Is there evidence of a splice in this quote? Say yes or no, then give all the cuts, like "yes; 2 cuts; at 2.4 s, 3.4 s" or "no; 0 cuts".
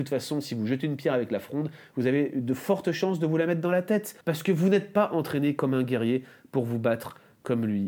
yes; 1 cut; at 4.2 s